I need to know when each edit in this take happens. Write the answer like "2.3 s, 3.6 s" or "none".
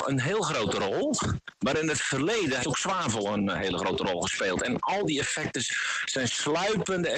2.6 s